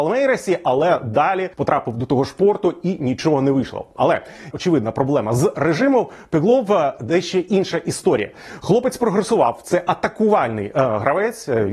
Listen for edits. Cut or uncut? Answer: cut